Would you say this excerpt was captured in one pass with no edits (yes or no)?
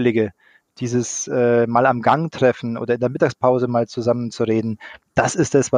yes